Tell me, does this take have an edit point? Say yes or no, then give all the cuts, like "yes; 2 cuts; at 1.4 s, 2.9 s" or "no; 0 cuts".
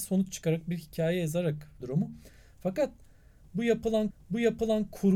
yes; 2 cuts; at 1.8 s, 4.1 s